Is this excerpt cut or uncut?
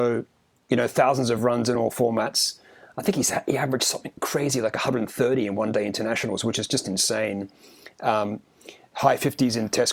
uncut